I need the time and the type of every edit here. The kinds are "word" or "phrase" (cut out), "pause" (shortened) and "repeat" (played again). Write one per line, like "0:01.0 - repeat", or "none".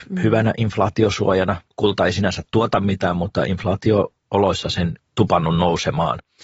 0:05.0 - phrase

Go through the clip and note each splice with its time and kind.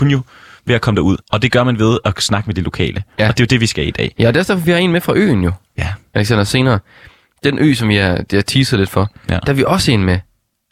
0:01.2 - pause

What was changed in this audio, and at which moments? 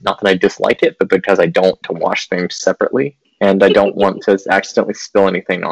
0:01.8 - word
0:03.2 - word

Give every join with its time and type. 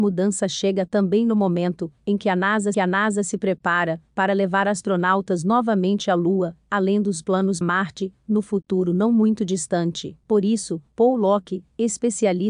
0:02.7 - repeat
0:07.6 - phrase
0:10.2 - pause

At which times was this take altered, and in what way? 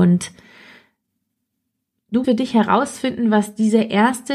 0:02.2 - word

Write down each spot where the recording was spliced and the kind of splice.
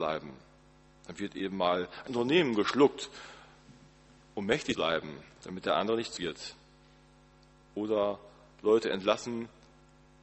0:02.1 - word
0:04.7 - word
0:06.2 - word

